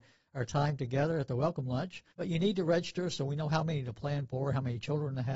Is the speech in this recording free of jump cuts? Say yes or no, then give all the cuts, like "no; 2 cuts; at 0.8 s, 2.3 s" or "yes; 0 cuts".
no; 1 cut; at 2.1 s